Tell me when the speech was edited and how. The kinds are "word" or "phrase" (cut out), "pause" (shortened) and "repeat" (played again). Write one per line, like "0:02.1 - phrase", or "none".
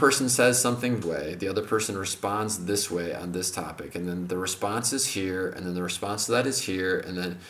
0:01.0 - word